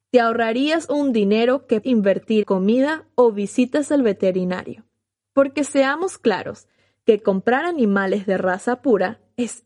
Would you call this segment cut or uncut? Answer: cut